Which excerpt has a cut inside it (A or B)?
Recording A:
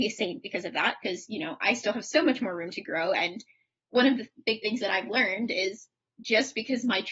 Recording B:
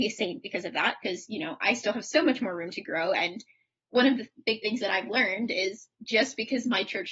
B